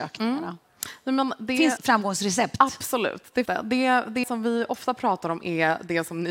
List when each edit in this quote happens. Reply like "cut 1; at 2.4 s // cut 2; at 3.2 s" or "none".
cut 1; at 1.8 s // cut 2; at 3.5 s // cut 3; at 4.2 s